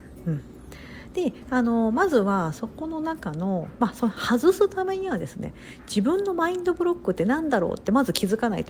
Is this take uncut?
yes; 0 cuts

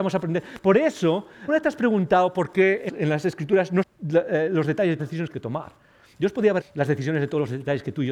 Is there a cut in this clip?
yes; 6 cuts; at 1.5 s, 2.9 s, 3.8 s, 5.0 s, 5.3 s, 6.6 s

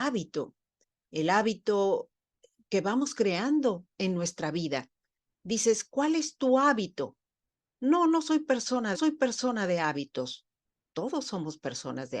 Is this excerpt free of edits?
no; 1 cut; at 8.9 s

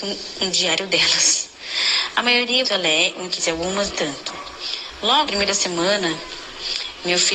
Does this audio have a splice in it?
yes; 4 cuts; at 2.6 s, 3.4 s, 3.9 s, 5.3 s

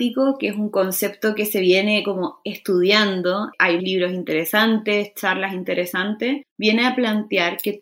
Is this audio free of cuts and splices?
no; 1 cut; at 3.8 s

